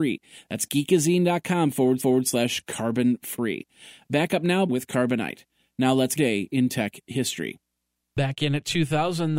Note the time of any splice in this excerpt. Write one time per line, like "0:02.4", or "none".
0:02.0
0:04.7
0:06.2